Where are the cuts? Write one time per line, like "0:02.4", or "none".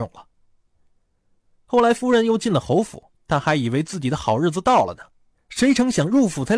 0:03.2

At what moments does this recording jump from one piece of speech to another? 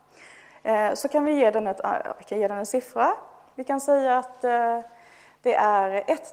none

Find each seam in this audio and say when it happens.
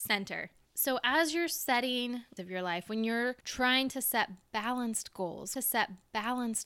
0:02.4
0:03.4
0:05.6

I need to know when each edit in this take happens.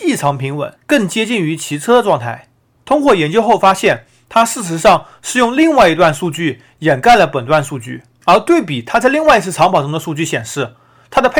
none

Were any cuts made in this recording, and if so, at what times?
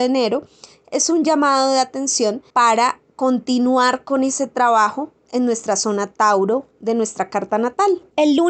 0:02.5

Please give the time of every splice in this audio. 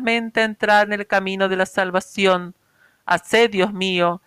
none

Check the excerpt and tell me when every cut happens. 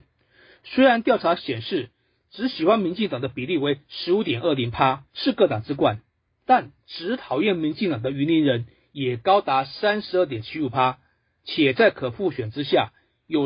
0:05.1

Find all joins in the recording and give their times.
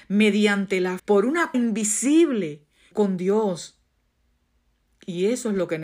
0:01.0
0:01.5
0:02.9

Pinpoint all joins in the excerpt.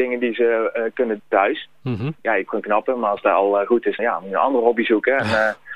0:01.2
0:02.1
0:02.5
0:04.0

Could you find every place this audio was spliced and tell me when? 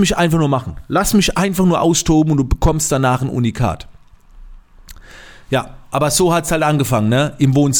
none

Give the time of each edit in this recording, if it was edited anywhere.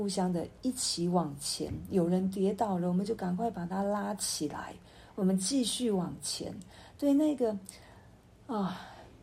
none

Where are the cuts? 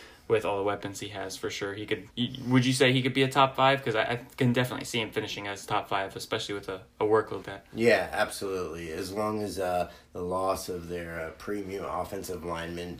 0:02.1
0:07.4

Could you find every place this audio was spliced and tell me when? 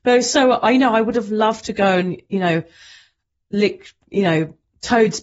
none

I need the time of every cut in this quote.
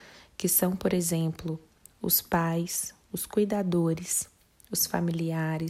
none

